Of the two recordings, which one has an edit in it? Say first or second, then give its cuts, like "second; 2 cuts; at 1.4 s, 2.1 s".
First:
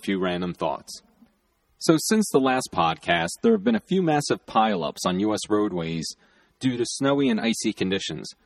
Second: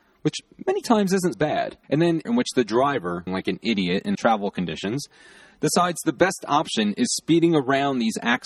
second; 5 cuts; at 1.3 s, 1.8 s, 2.2 s, 3.3 s, 4.1 s